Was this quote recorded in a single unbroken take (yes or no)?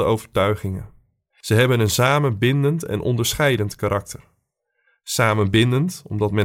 yes